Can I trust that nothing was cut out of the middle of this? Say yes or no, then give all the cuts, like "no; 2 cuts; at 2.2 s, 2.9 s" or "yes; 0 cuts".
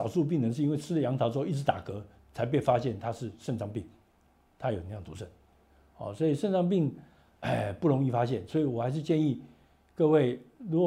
yes; 0 cuts